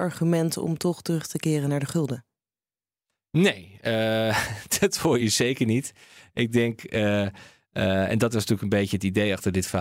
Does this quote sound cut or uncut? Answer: uncut